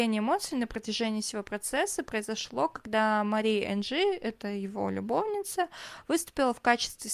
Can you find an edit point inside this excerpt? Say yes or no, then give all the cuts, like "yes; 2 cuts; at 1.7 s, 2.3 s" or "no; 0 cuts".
no; 0 cuts